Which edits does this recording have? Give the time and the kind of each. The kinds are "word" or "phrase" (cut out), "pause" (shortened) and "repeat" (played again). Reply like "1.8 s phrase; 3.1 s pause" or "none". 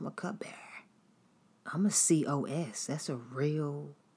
none